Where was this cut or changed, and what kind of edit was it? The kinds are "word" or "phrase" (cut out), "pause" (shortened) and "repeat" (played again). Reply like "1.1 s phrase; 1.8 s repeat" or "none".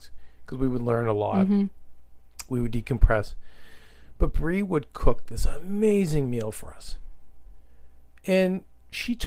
none

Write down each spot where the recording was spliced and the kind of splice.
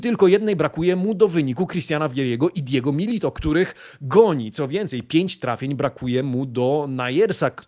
none

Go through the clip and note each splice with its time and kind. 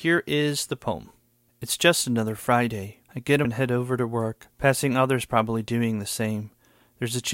1.3 s pause; 3.0 s pause; 3.4 s phrase; 4.5 s pause

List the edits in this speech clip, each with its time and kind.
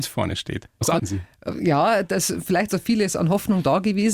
1.0 s word; 2.7 s word

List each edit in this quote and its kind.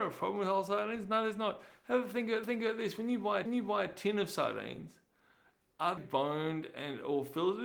2.4 s repeat; 3.5 s repeat; 6.0 s word

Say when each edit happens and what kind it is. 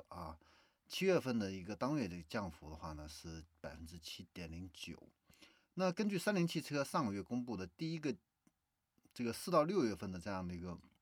none

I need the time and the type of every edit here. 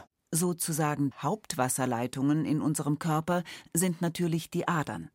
1.1 s word

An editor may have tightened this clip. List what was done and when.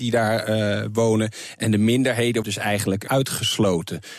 2.4 s word; 3.1 s word

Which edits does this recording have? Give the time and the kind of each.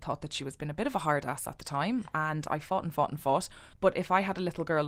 3.7 s pause

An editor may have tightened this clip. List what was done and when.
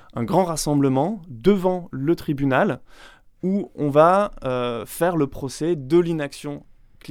none

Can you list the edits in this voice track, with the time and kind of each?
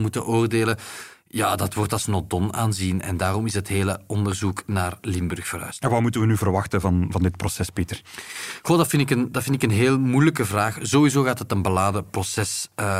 none

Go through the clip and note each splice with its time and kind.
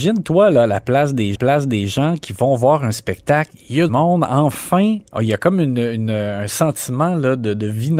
1.3 s repeat; 3.9 s word; 5.1 s pause

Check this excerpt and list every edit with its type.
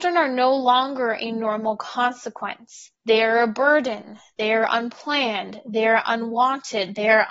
3.0 s pause

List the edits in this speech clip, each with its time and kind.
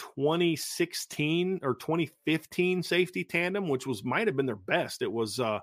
none

